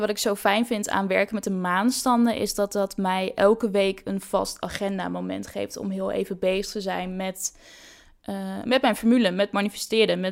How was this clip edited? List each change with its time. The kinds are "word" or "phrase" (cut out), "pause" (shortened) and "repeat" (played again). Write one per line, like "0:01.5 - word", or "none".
none